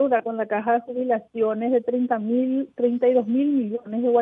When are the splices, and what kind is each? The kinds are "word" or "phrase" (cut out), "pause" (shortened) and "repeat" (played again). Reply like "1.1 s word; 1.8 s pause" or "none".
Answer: none